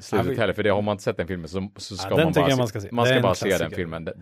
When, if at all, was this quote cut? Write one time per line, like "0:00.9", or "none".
none